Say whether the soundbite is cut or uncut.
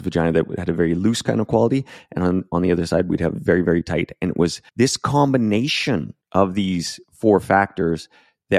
cut